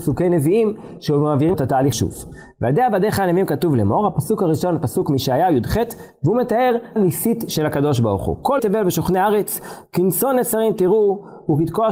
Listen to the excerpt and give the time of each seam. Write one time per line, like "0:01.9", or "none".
0:01.5
0:01.9
0:07.0
0:08.6